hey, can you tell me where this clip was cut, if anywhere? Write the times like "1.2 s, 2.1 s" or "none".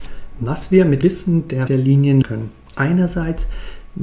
1.0 s, 1.7 s, 2.2 s, 2.7 s